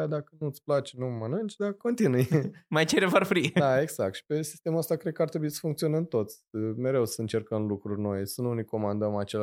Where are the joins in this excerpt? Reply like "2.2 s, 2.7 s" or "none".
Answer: 1.8 s